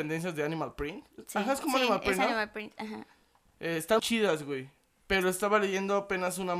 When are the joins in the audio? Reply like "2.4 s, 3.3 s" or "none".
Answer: 4.0 s